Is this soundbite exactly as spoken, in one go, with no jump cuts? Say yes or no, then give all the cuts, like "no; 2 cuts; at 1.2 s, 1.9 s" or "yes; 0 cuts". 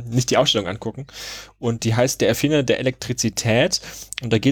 yes; 0 cuts